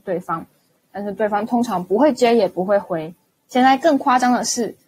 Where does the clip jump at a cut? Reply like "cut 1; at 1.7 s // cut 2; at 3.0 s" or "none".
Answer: cut 1; at 3.2 s